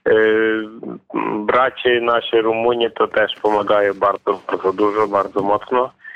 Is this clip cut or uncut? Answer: uncut